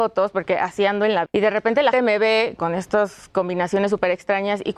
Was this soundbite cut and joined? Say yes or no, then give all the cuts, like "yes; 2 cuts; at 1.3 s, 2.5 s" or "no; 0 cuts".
yes; 3 cuts; at 1.3 s, 1.9 s, 2.6 s